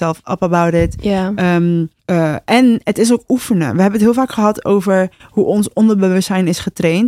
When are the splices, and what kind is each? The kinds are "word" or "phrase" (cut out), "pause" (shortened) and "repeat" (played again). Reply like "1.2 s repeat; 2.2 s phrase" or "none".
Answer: 2.0 s pause